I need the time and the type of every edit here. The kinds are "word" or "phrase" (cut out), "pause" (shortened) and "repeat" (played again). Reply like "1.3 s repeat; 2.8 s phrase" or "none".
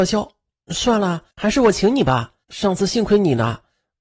1.3 s pause; 2.4 s pause